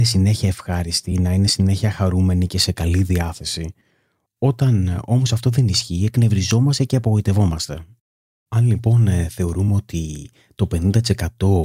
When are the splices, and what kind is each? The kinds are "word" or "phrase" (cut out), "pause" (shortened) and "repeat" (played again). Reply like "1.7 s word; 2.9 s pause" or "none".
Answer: none